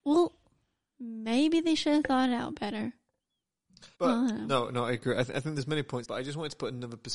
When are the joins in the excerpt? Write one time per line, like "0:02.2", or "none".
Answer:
0:03.9
0:06.0